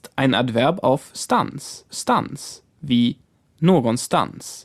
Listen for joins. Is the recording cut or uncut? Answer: cut